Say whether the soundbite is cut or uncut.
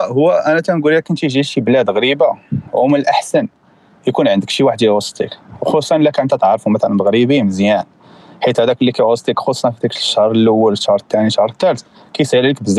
uncut